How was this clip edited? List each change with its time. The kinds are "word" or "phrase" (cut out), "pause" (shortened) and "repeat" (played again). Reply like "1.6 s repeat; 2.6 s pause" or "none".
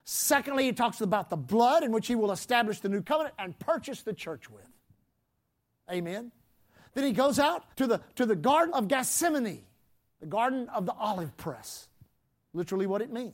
3.0 s word; 7.7 s pause; 8.7 s word